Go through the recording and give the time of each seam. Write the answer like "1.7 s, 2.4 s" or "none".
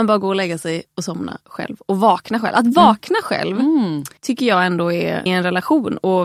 4.2 s, 5.3 s